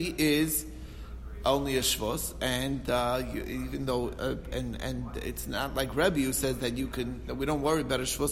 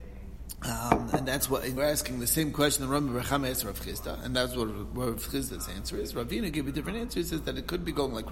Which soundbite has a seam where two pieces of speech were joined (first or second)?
second